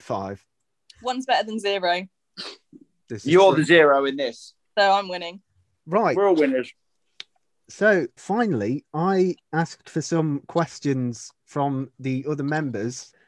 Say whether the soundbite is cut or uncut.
cut